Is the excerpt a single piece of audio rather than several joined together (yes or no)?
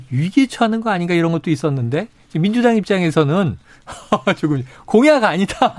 yes